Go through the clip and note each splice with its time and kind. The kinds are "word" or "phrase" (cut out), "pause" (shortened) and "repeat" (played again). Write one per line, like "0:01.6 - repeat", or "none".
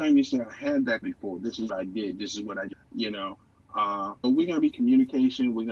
0:01.0 - word
0:01.7 - word
0:02.7 - word
0:04.2 - word
0:04.7 - word